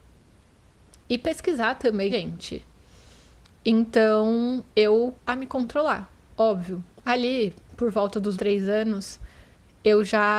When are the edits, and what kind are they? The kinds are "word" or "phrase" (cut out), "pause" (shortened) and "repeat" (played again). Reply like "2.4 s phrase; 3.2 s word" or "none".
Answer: 2.1 s word; 5.2 s word; 8.3 s word